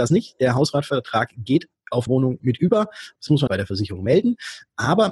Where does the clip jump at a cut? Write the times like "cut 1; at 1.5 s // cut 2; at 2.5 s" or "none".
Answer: cut 1; at 2.1 s // cut 2; at 2.4 s // cut 3; at 3.5 s